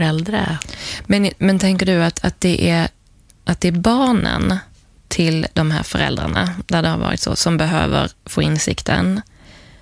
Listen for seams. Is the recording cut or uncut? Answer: uncut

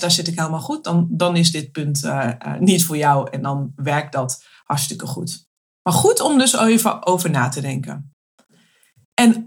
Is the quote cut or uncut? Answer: uncut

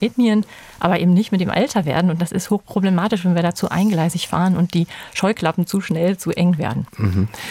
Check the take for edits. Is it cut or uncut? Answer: uncut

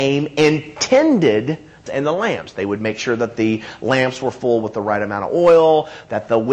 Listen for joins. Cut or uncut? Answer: cut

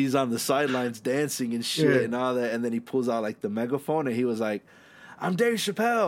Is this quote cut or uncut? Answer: uncut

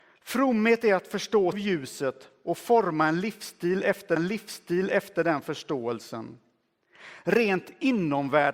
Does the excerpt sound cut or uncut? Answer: cut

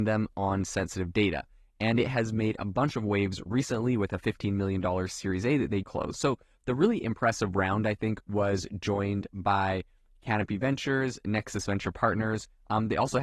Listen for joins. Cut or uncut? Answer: cut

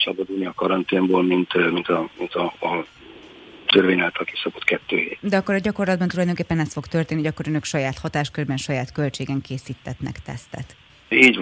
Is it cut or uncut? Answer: uncut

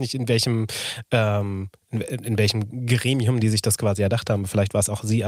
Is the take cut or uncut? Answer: uncut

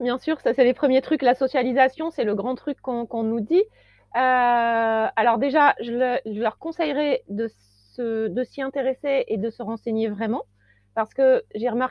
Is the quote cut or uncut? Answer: uncut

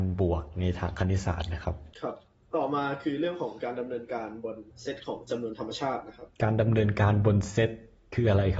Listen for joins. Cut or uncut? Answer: cut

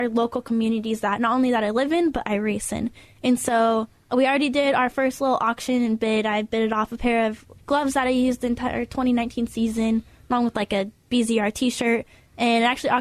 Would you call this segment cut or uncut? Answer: cut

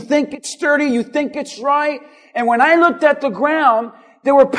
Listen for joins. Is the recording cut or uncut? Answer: uncut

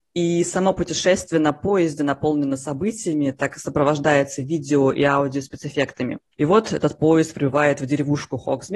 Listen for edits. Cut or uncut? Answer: cut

